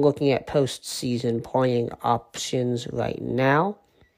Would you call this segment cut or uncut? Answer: uncut